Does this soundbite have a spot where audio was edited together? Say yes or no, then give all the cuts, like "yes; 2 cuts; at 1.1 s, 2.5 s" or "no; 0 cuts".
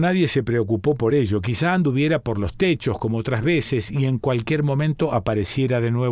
no; 0 cuts